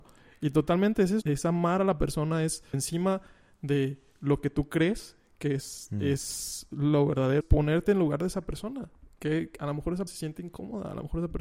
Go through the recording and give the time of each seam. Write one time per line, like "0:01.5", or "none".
0:01.2
0:02.7
0:07.4
0:10.1